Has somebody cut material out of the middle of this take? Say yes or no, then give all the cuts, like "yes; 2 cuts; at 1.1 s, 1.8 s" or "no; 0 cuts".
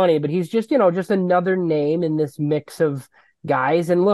no; 0 cuts